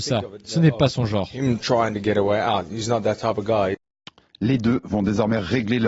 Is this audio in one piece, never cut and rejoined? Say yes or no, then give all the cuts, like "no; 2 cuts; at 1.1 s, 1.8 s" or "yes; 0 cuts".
yes; 0 cuts